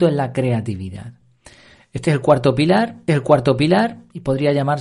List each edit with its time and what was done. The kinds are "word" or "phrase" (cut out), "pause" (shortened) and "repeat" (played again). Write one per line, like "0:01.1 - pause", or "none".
0:03.1 - repeat